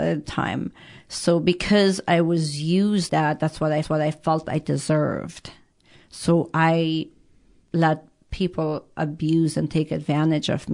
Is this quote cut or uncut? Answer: cut